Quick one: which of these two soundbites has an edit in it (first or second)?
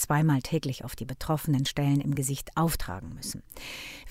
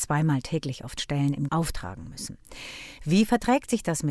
second